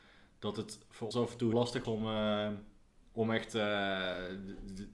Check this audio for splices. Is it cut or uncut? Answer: cut